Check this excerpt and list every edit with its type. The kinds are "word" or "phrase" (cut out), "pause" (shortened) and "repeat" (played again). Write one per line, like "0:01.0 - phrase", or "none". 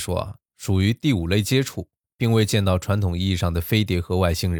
none